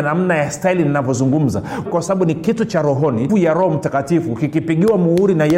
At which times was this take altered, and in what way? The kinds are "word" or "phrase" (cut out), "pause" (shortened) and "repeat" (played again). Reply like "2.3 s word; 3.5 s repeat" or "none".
1.9 s word; 3.3 s phrase